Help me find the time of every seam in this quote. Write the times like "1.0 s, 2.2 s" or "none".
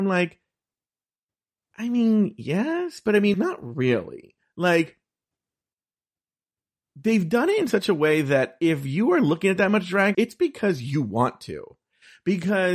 3.3 s, 10.1 s